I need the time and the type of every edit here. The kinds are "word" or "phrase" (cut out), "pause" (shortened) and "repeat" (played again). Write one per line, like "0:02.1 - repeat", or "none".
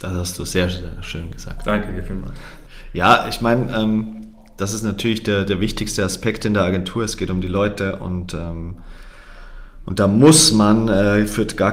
none